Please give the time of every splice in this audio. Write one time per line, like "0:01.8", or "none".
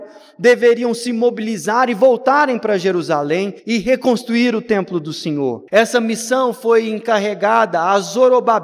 0:03.6
0:05.7